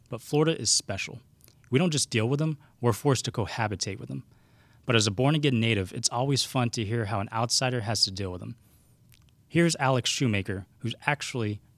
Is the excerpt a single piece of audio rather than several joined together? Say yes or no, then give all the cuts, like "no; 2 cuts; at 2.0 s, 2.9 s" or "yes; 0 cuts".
yes; 0 cuts